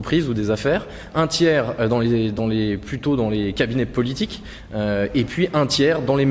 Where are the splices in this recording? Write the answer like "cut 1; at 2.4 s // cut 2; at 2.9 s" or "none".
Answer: none